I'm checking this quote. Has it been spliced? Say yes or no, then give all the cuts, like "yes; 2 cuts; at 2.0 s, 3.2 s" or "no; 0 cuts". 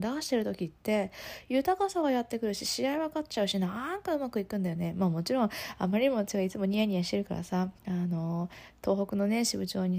yes; 1 cut; at 7.8 s